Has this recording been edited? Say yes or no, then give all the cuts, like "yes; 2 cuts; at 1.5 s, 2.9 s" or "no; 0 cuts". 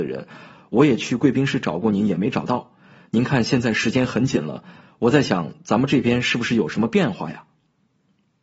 no; 0 cuts